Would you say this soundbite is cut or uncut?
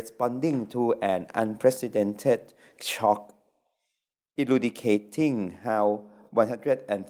uncut